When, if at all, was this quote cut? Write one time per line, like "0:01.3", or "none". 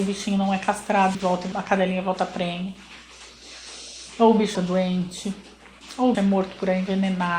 0:01.1
0:01.5
0:04.5
0:06.1